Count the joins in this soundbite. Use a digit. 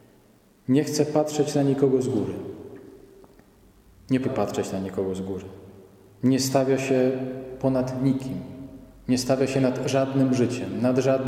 2